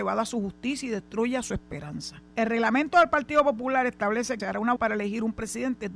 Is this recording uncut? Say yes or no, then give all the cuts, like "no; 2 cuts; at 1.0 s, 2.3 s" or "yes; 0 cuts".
no; 3 cuts; at 2.3 s, 4.4 s, 4.8 s